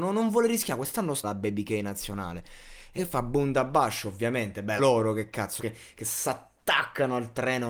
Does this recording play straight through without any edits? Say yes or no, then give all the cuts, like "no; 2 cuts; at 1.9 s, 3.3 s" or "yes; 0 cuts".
no; 4 cuts; at 1.2 s, 3.0 s, 4.8 s, 5.6 s